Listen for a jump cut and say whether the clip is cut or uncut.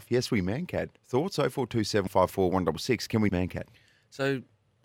cut